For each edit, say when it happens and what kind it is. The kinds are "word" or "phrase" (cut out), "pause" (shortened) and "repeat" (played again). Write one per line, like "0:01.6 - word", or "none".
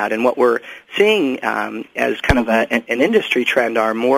none